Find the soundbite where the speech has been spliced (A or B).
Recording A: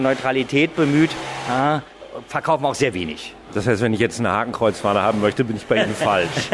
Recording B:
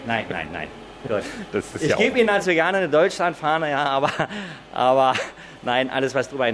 A